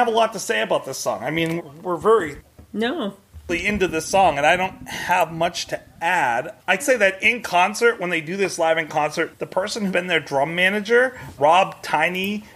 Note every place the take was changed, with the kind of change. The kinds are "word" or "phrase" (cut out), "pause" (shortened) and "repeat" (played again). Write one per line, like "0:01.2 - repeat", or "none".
0:01.6 - word
0:06.8 - word
0:09.3 - word
0:09.9 - word
0:11.4 - word